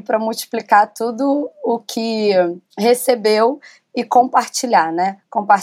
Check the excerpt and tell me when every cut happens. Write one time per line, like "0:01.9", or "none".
none